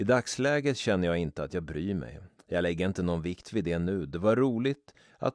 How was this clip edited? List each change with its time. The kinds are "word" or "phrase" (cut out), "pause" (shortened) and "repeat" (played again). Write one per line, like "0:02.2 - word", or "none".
0:02.4 - pause